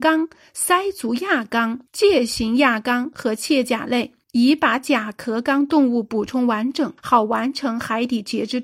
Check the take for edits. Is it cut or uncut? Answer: cut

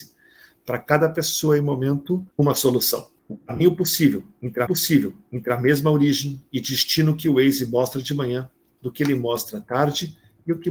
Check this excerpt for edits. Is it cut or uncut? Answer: cut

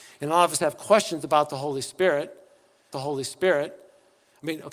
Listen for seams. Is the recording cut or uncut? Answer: cut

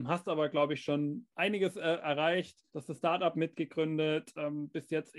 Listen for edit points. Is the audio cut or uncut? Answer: cut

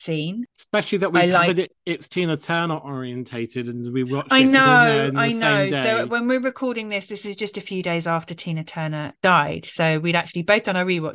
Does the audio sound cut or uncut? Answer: cut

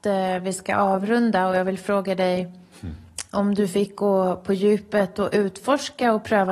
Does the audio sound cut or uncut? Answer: uncut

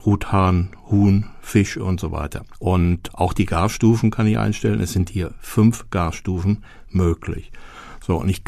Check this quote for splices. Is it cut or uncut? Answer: uncut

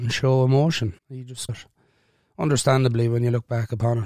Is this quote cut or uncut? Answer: cut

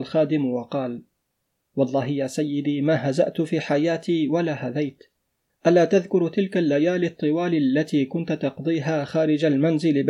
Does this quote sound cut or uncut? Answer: uncut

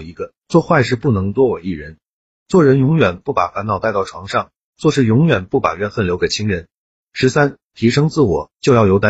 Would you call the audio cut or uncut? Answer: uncut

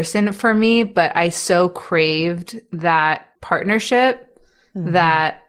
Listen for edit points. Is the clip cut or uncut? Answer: cut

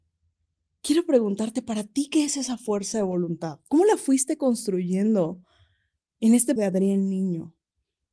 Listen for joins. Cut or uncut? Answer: cut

